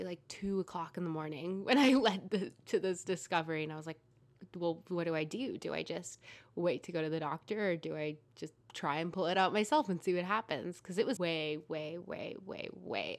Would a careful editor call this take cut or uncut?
cut